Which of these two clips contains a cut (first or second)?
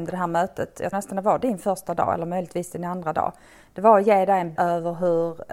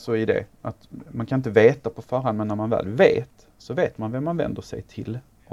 first